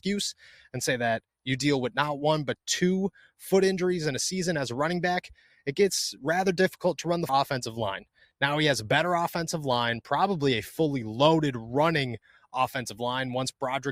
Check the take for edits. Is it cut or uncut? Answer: cut